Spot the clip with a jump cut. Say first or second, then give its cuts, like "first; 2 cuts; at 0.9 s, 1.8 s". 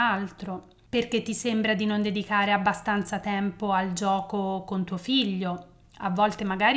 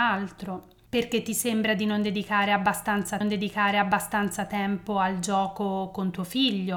second; 1 cut; at 3.2 s